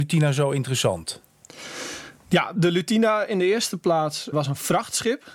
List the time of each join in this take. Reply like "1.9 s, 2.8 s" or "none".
4.3 s